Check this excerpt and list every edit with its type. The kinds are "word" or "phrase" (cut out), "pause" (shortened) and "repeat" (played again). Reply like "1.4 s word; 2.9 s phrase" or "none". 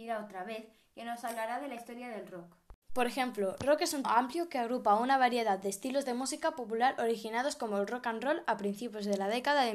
2.8 s pause; 4.0 s word